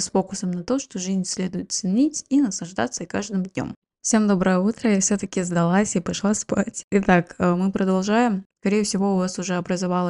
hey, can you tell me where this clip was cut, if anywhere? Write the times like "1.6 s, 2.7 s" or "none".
none